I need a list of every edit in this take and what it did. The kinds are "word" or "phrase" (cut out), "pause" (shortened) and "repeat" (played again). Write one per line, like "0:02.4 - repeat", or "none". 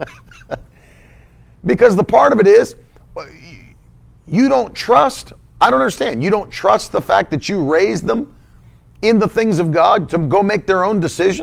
none